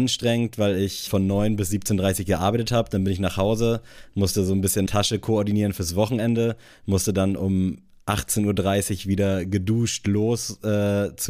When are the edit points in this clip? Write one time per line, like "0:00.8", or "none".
0:01.1
0:04.9